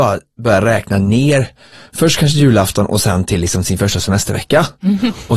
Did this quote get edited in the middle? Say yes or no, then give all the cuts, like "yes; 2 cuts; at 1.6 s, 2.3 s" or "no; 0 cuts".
no; 0 cuts